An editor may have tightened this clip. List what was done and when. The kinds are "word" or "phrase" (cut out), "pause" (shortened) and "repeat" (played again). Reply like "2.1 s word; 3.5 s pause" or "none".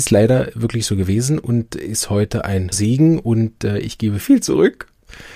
2.7 s word; 4.2 s word